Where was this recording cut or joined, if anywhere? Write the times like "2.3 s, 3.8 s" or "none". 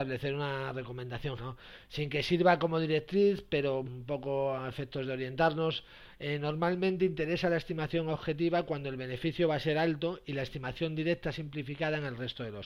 1.4 s, 3.8 s